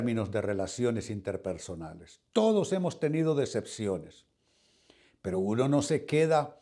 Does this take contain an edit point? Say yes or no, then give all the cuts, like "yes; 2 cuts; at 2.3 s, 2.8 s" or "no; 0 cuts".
no; 0 cuts